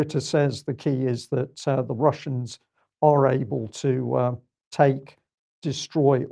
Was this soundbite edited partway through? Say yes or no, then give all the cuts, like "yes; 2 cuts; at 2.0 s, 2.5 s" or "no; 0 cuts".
no; 0 cuts